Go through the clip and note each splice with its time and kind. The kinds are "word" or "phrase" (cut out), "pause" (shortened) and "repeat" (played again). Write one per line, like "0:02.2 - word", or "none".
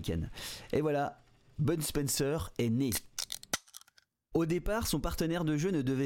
none